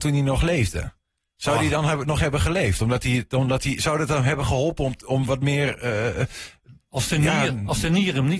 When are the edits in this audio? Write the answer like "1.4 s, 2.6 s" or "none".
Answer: none